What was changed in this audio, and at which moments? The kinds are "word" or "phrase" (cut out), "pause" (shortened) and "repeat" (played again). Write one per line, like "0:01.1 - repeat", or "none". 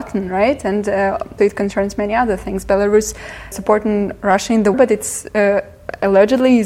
0:01.4 - word
0:03.5 - word
0:04.7 - word